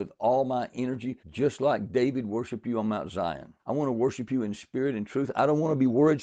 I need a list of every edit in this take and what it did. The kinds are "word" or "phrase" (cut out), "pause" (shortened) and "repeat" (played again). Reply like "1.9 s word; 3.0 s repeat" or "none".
1.2 s pause; 3.6 s pause